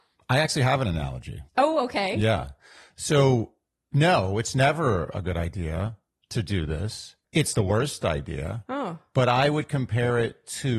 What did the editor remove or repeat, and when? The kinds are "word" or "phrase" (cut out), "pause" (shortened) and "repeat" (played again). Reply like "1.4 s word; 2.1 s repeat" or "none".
1.5 s pause; 7.5 s word